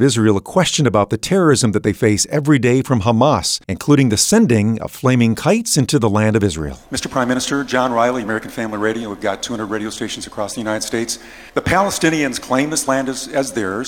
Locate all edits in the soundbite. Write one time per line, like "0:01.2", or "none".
0:03.6
0:11.5